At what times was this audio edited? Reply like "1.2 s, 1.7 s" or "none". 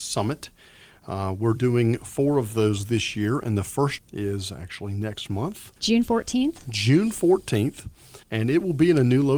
4.0 s, 5.8 s, 8.2 s